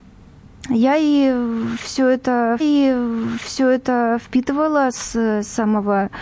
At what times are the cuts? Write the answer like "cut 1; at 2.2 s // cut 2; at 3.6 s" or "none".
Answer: cut 1; at 2.6 s